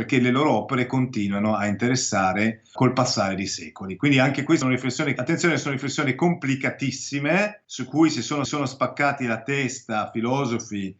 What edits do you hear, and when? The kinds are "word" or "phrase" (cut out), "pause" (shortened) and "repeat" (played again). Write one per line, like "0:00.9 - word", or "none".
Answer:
0:02.8 - word
0:04.6 - word
0:05.2 - phrase
0:07.6 - pause
0:08.4 - repeat